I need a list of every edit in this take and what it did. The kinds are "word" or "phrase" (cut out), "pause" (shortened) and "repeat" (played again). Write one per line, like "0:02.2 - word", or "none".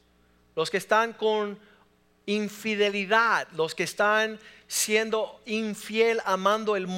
none